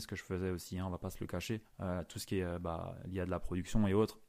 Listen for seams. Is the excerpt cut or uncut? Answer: cut